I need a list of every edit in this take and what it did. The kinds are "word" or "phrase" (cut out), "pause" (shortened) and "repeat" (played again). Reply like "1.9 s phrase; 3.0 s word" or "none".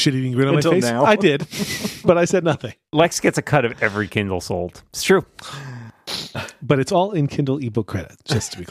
none

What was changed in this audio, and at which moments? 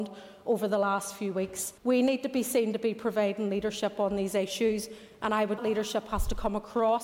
1.8 s pause; 5.6 s phrase

